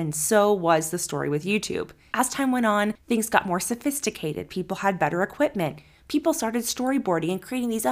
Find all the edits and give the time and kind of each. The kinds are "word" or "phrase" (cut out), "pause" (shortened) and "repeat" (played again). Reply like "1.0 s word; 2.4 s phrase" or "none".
none